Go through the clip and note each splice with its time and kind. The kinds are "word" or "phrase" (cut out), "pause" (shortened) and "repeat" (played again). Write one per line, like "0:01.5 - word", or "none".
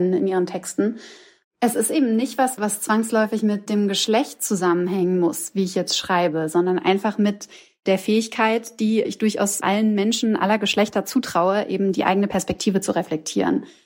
none